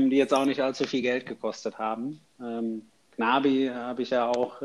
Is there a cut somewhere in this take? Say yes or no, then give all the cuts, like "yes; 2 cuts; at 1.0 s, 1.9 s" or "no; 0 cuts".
no; 0 cuts